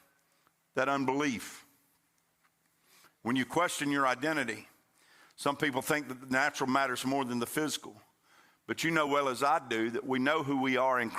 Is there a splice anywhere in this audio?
no; 0 cuts

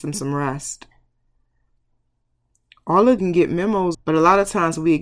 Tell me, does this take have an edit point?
yes; 2 cuts; at 3.2 s, 3.9 s

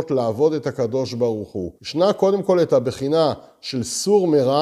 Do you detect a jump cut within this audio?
yes; 1 cut; at 1.8 s

